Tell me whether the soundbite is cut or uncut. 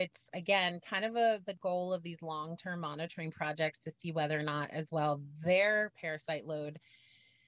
uncut